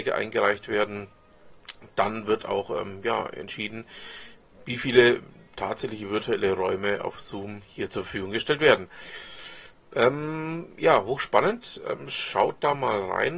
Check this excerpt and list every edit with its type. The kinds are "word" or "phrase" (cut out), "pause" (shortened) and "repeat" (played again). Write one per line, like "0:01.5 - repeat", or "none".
none

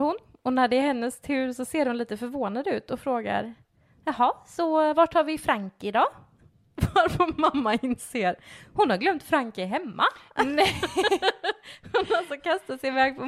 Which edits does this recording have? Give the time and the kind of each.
none

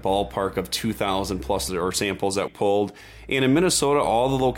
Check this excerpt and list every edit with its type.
0:01.7 - word
0:02.5 - word

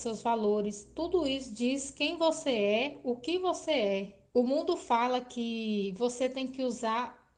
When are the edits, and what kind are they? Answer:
0:04.3 - pause

